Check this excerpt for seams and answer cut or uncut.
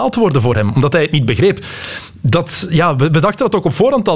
uncut